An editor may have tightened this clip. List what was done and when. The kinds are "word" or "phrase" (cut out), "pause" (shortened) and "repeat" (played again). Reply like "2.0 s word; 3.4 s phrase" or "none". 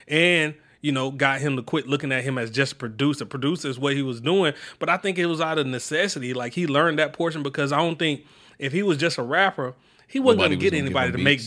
none